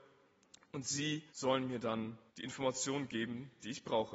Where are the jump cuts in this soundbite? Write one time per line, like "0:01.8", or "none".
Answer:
0:01.3
0:02.3